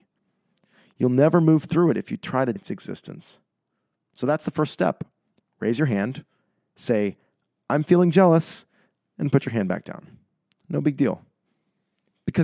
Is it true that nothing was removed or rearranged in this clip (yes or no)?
no